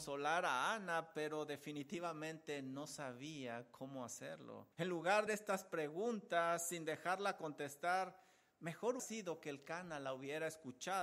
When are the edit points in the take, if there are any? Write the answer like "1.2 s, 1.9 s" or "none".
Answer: 4.7 s, 5.3 s, 9.0 s